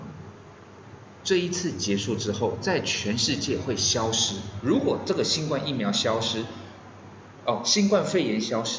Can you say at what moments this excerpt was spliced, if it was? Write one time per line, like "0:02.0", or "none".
none